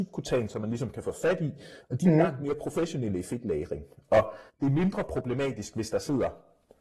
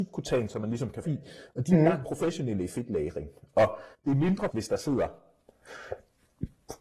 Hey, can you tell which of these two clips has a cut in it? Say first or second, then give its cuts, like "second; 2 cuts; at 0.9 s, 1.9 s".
second; 3 cuts; at 1.0 s, 2.0 s, 4.5 s